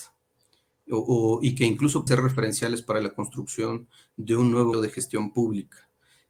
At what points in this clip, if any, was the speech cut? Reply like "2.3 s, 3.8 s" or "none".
2.1 s, 4.7 s